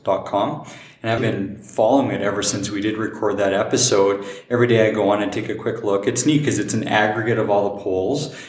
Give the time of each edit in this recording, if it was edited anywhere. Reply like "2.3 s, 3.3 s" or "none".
1.2 s